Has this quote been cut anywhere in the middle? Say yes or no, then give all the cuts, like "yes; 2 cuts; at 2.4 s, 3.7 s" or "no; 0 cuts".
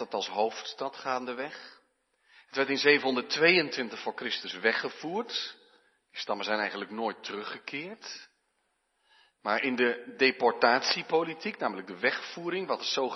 no; 0 cuts